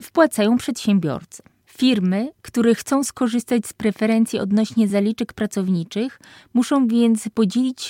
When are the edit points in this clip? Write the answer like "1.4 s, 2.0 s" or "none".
none